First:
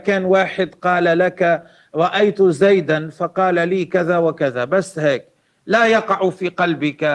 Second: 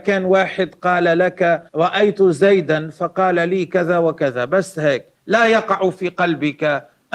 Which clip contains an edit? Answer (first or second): second